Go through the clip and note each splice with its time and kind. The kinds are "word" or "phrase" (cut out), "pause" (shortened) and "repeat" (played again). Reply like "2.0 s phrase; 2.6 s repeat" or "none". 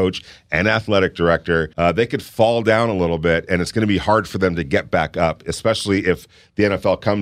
1.7 s pause